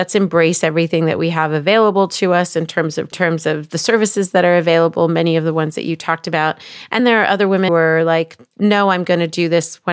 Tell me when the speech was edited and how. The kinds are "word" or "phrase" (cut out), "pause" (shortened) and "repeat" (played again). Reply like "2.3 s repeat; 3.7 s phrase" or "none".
3.1 s phrase; 7.0 s word; 7.7 s word